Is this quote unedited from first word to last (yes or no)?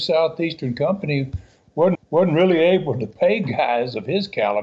no